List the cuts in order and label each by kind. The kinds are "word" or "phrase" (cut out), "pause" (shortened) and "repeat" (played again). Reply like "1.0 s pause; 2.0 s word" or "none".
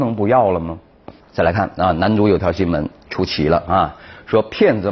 1.2 s pause